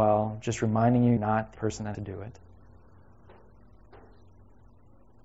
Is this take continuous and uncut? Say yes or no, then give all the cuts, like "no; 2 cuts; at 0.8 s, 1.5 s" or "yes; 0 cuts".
no; 3 cuts; at 1.2 s, 1.6 s, 1.9 s